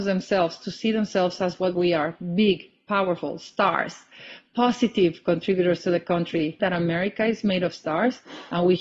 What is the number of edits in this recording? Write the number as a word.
one